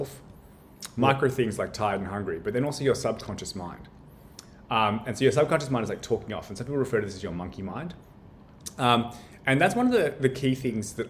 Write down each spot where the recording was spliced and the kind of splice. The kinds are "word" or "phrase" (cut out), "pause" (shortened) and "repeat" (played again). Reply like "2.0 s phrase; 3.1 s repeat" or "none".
none